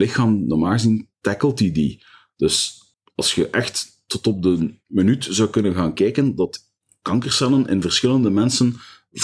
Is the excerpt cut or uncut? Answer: uncut